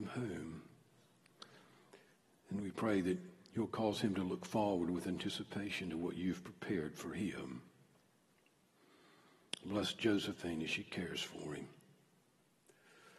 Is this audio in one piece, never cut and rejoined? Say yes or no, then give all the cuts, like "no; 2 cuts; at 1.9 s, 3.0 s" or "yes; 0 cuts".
yes; 0 cuts